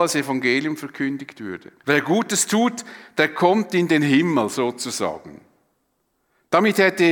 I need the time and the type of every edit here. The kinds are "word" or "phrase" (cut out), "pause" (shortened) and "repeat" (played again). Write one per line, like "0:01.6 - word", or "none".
0:01.8 - pause